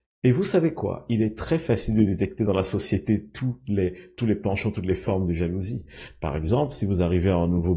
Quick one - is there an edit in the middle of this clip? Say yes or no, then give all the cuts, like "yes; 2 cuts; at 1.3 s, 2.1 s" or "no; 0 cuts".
no; 0 cuts